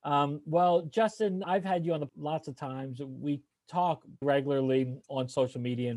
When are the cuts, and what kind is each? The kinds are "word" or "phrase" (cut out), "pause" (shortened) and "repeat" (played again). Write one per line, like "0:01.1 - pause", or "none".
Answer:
0:01.4 - word
0:02.1 - word
0:04.2 - word